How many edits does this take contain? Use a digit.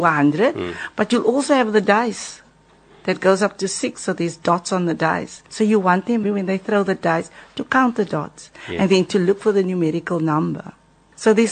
2